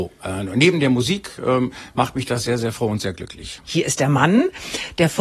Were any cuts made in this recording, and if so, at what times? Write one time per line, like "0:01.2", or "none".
0:03.6